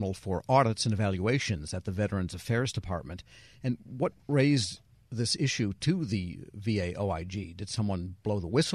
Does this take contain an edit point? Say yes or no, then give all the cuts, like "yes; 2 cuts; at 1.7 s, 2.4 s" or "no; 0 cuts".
no; 0 cuts